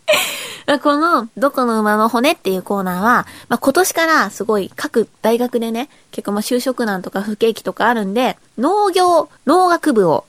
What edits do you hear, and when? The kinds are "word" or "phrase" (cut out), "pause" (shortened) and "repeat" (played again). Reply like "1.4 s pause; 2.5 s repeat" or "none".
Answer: 8.5 s pause; 9.4 s pause